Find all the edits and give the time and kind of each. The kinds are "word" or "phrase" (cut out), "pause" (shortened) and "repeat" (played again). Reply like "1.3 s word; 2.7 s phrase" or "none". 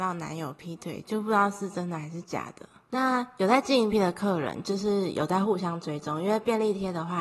3.9 s word